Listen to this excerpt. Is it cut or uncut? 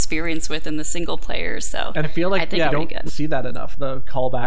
cut